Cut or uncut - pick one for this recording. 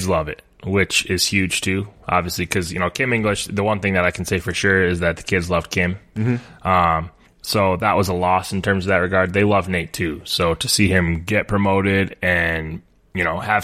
cut